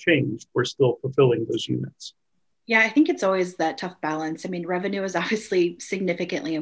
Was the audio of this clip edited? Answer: no; 0 cuts

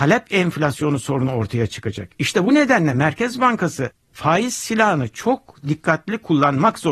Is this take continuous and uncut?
yes; 0 cuts

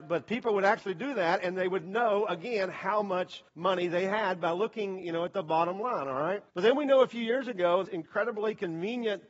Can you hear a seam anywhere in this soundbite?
yes; 3 cuts; at 3.5 s, 6.5 s, 7.8 s

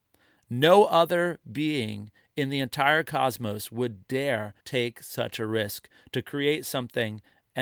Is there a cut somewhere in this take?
yes; 1 cut; at 4.6 s

